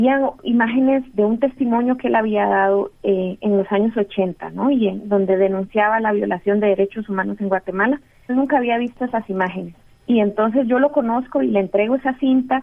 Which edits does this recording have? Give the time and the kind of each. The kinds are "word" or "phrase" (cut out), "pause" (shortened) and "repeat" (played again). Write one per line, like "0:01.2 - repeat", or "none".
0:01.1 - word
0:08.3 - word
0:09.9 - pause